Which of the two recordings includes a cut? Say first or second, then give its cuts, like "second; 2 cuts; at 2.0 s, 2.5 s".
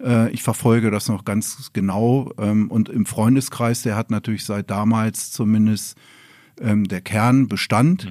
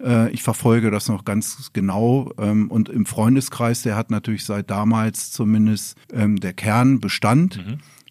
second; 1 cut; at 6.0 s